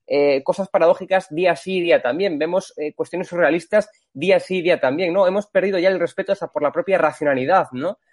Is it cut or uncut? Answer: uncut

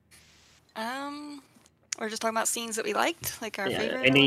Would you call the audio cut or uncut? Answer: uncut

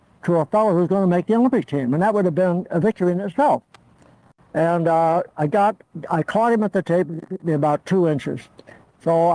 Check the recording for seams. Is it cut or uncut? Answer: uncut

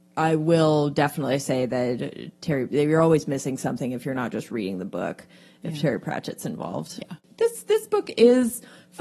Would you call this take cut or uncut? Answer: uncut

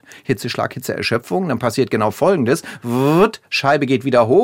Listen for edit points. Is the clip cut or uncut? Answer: uncut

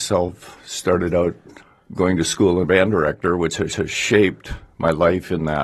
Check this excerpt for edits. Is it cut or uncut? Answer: cut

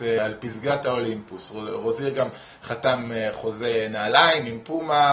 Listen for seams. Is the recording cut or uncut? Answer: uncut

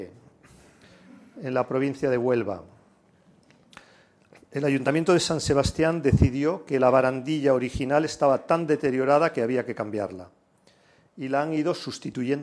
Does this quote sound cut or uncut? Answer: uncut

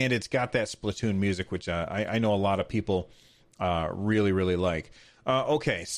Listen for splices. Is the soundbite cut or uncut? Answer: uncut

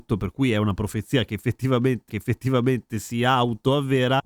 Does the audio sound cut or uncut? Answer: cut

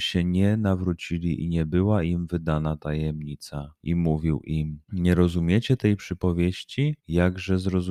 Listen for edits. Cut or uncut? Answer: cut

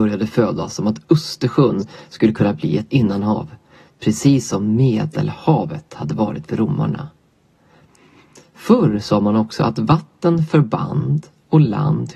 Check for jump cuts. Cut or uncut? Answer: cut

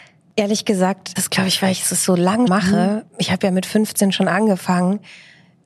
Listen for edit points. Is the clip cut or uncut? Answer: cut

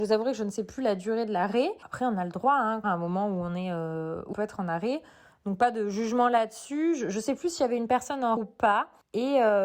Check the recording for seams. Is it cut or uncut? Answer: cut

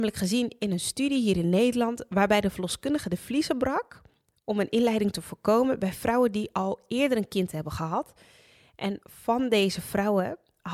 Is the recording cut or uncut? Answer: uncut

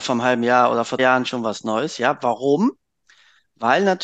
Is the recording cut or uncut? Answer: cut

